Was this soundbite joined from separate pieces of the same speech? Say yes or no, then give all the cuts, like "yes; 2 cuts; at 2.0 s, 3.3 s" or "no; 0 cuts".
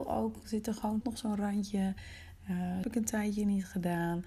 yes; 2 cuts; at 1.0 s, 2.8 s